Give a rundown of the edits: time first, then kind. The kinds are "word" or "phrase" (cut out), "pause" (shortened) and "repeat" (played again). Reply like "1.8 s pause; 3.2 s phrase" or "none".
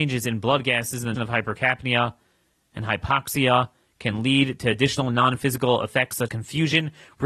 1.2 s word; 6.3 s word